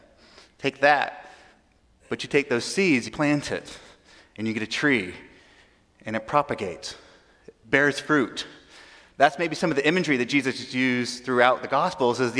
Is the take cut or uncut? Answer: cut